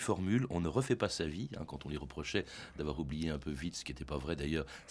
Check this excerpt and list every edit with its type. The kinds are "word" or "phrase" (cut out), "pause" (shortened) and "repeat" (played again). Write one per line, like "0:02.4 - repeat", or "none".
none